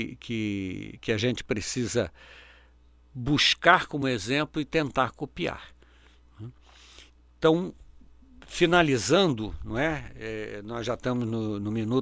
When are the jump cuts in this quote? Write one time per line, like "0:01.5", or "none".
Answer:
none

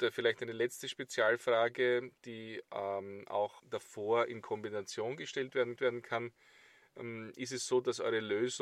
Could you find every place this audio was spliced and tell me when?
0:03.6
0:05.8

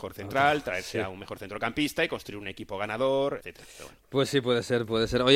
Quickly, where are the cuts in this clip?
0:03.4

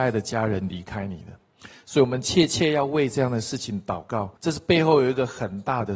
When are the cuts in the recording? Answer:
0:04.4

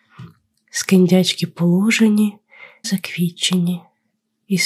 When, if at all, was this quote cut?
0:02.8

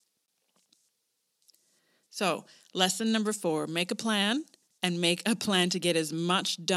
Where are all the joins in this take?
0:04.6

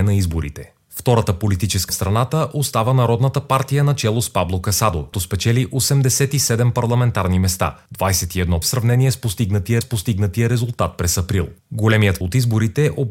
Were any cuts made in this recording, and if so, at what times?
0:01.9
0:05.1
0:08.6
0:09.8
0:12.2

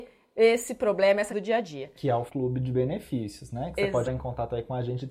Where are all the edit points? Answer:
0:01.3
0:02.3
0:04.0

